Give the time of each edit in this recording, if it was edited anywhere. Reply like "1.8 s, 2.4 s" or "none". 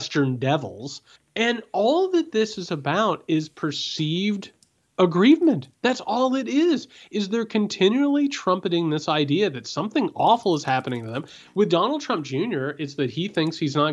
1.2 s